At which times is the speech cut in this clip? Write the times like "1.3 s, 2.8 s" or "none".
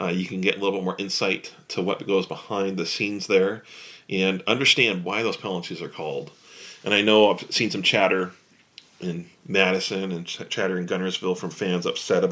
none